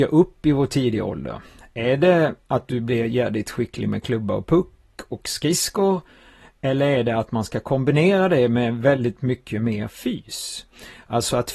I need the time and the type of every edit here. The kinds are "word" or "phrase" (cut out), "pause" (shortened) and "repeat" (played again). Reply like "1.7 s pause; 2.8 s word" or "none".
none